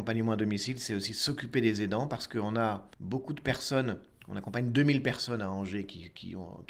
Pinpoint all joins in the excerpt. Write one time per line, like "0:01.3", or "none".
0:02.9